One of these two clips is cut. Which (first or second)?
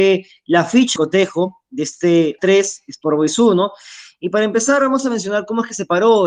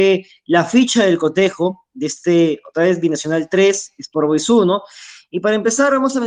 first